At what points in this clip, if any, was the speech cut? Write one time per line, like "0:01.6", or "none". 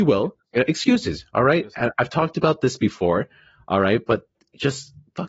none